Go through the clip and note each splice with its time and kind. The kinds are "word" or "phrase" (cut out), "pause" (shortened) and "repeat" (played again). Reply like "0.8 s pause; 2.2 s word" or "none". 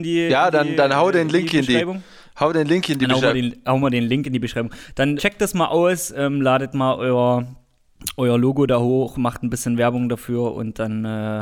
5.2 s word